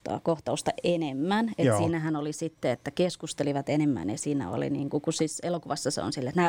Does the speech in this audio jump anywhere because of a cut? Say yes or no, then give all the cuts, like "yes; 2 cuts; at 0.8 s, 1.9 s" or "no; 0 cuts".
no; 0 cuts